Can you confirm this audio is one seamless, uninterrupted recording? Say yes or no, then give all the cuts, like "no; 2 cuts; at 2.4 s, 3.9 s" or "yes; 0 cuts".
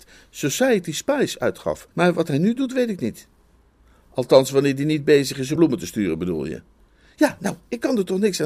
no; 2 cuts; at 1.9 s, 5.6 s